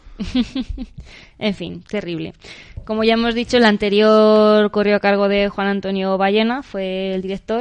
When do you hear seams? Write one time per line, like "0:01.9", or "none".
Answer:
none